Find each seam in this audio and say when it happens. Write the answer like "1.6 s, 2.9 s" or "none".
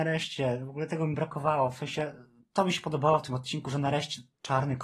2.4 s